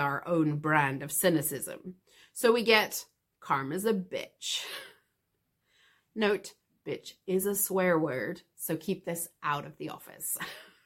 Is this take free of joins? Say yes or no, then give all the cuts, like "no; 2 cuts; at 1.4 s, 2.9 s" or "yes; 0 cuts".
yes; 0 cuts